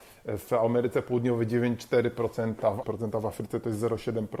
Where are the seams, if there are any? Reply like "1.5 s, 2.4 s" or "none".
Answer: 2.8 s